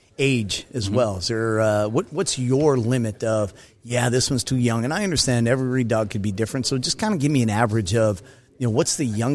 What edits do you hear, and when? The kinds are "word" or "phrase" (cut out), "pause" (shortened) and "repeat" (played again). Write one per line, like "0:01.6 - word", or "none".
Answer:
none